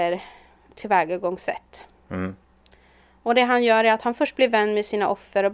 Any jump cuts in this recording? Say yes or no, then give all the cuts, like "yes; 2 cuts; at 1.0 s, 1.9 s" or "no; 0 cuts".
no; 0 cuts